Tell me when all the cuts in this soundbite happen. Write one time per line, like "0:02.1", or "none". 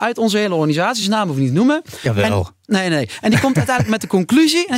none